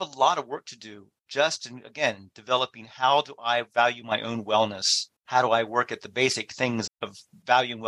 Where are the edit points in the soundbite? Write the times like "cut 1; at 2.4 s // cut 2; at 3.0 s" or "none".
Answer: cut 1; at 1.2 s // cut 2; at 5.2 s // cut 3; at 6.9 s